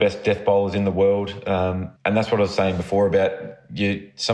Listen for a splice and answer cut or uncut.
cut